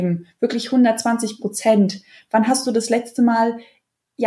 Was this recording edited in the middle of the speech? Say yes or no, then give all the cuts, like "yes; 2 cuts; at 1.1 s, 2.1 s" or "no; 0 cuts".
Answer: no; 0 cuts